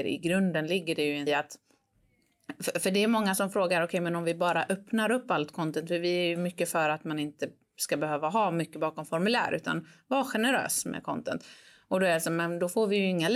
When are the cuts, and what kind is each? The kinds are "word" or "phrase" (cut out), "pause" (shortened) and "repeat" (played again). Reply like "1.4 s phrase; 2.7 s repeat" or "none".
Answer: 1.3 s word